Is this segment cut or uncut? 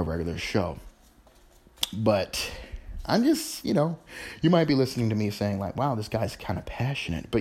uncut